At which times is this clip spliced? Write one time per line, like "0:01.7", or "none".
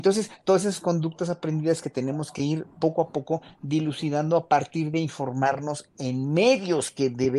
none